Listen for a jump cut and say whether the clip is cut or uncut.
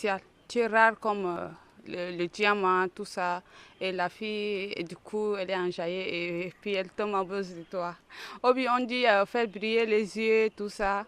uncut